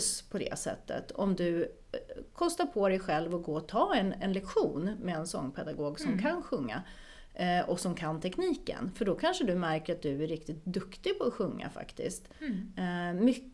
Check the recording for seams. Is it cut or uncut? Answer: uncut